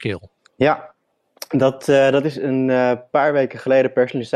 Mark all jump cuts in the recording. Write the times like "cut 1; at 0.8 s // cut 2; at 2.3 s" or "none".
none